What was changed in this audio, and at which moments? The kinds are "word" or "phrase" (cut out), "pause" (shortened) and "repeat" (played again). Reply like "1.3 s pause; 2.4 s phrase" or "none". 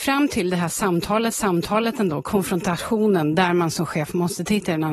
1.3 s repeat